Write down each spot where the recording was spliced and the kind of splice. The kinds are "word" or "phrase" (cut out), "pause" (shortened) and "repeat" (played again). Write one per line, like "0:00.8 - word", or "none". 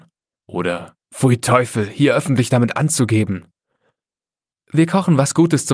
0:01.0 - pause